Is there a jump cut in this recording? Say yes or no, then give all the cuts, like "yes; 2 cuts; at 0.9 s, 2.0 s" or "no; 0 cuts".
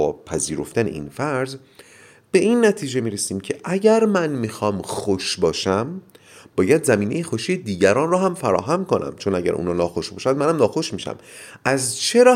no; 0 cuts